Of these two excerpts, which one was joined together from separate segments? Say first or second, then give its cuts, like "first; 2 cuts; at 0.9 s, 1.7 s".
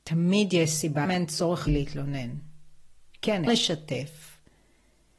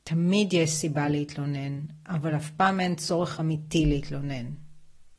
first; 3 cuts; at 1.0 s, 1.7 s, 3.5 s